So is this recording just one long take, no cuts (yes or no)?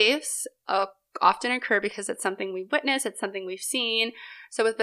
yes